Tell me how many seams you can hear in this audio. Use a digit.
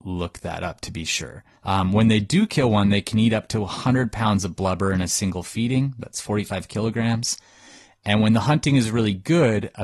0